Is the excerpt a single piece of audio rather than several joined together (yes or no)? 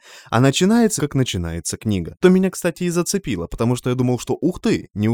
no